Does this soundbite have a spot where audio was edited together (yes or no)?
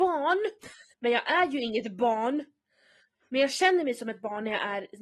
no